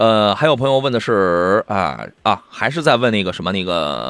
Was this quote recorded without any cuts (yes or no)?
no